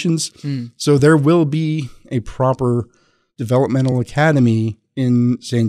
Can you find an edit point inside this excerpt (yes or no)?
no